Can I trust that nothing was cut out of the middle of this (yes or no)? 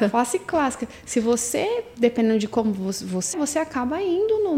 no